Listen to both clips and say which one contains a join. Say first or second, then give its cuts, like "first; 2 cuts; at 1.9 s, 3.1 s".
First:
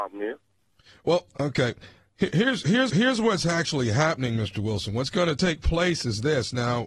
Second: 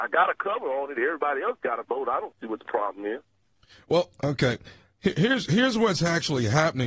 first; 1 cut; at 2.9 s